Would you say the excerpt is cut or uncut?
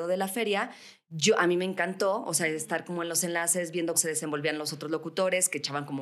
cut